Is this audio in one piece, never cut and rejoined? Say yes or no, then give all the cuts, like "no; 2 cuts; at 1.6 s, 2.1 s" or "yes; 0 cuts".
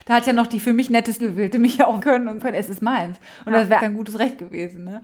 no; 5 cuts; at 1.2 s, 1.5 s, 2.0 s, 2.4 s, 3.8 s